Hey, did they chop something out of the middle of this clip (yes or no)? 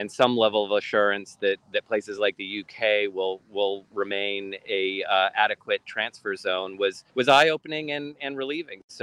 yes